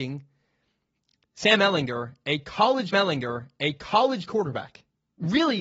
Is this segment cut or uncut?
cut